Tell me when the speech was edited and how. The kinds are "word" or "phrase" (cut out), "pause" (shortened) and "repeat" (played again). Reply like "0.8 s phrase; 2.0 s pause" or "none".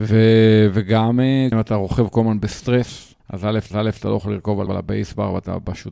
1.5 s word; 3.2 s pause; 3.7 s repeat; 4.7 s phrase

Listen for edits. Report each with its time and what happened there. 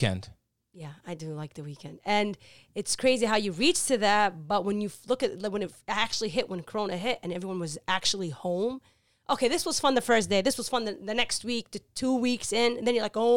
none

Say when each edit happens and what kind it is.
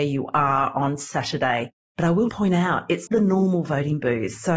2.3 s word; 3.1 s word

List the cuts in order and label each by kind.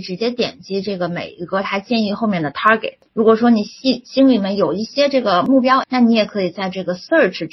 5.8 s word

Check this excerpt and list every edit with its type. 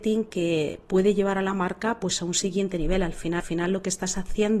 3.4 s repeat

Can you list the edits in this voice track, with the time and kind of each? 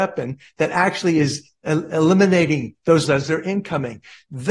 1.6 s pause; 3.0 s word

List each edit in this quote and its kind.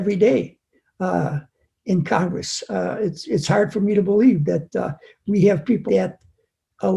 5.9 s word

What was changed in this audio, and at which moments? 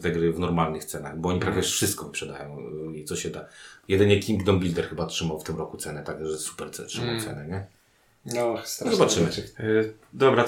none

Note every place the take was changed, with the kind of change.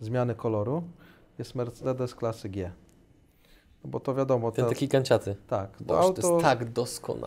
none

